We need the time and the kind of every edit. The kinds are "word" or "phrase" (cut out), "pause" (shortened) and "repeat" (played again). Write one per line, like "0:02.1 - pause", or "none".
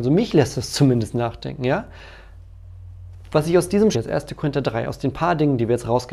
0:03.9 - word

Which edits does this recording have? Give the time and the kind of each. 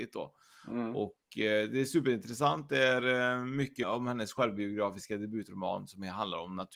0:03.8 - word

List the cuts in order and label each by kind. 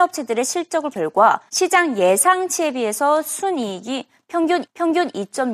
0:00.9 - word
0:01.5 - pause
0:04.6 - repeat

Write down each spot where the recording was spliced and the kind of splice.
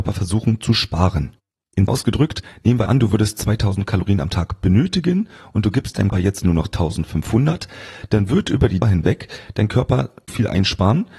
0:01.9 - word
0:02.9 - word
0:06.1 - word
0:08.8 - word
0:10.3 - word

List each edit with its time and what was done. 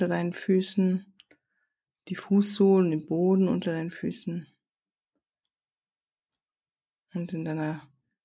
none

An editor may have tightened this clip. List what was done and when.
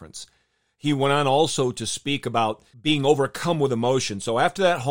0:02.7 - pause

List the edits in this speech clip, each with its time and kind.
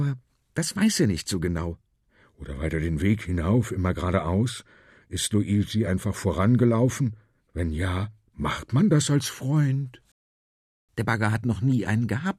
none

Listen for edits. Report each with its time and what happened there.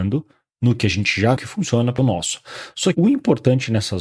0:01.4 - word
0:02.0 - phrase
0:02.9 - word

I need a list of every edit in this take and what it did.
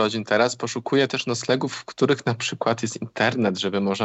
none

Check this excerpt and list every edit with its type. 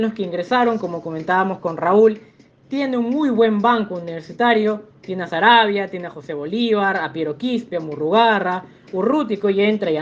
none

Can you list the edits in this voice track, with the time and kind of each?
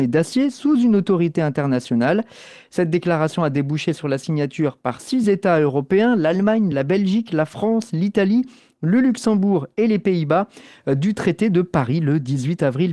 none

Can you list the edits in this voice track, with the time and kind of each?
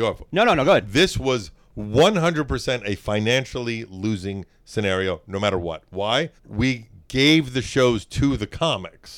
0:06.4 - pause

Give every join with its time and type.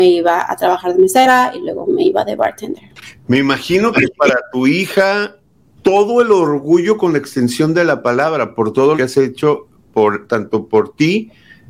0:05.8 - word
0:09.0 - word

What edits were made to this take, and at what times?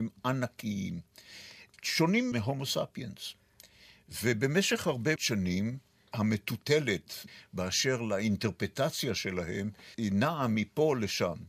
0:02.3 - word
0:05.2 - word

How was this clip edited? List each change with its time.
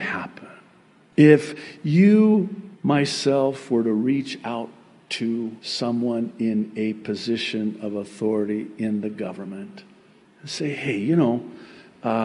0:02.7 - pause
0:05.6 - pause
0:10.2 - pause

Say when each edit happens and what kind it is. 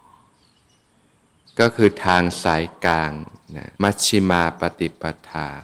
0:03.7 - pause

